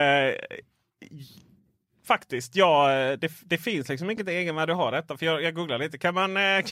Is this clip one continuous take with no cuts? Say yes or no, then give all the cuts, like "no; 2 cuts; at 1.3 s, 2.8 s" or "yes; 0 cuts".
yes; 0 cuts